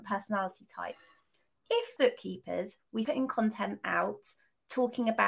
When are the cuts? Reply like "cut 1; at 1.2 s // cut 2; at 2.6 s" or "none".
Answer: cut 1; at 2.0 s // cut 2; at 3.0 s